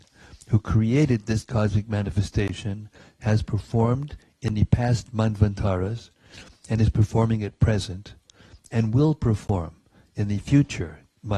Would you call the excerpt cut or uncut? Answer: uncut